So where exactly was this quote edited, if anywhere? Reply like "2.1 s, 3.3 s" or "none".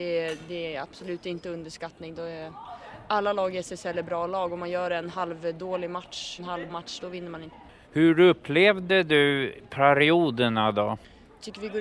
6.4 s, 6.7 s, 7.0 s